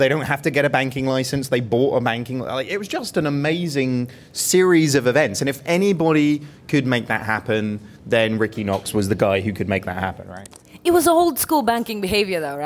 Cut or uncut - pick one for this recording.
uncut